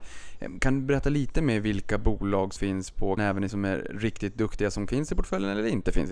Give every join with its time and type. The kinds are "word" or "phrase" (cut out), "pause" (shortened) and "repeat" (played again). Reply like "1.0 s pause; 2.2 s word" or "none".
2.6 s word; 3.2 s phrase; 3.5 s word; 4.9 s word